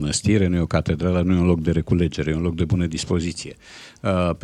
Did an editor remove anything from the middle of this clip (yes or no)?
no